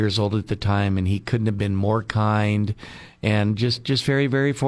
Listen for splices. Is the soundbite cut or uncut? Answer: uncut